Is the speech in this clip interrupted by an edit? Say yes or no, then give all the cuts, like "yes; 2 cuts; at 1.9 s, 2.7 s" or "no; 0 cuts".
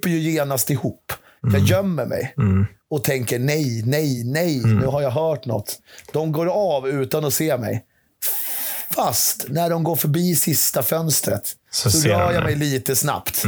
no; 0 cuts